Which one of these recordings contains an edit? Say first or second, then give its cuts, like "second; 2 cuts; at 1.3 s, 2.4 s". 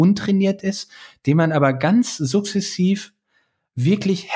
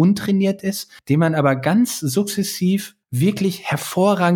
second; 2 cuts; at 1.0 s, 3.0 s